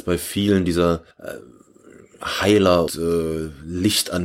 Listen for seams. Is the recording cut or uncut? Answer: cut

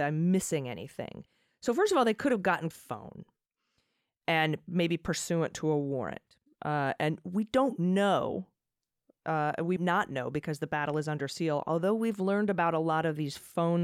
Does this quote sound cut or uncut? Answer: cut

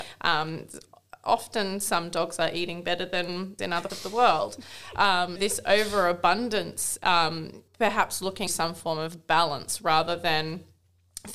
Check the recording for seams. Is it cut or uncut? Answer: cut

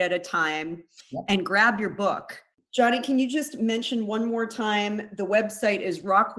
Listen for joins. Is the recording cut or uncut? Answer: uncut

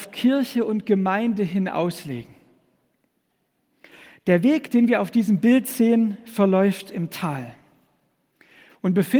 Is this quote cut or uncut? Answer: uncut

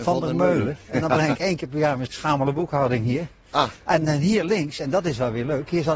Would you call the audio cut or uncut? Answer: cut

